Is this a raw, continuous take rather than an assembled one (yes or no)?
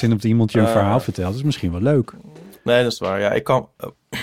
yes